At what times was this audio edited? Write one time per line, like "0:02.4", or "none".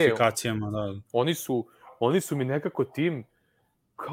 0:01.1